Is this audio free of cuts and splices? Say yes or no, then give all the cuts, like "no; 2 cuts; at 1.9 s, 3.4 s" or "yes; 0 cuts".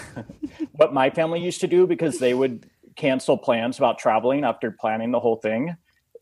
yes; 0 cuts